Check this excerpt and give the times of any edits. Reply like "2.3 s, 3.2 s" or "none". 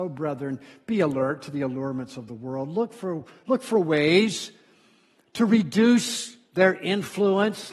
none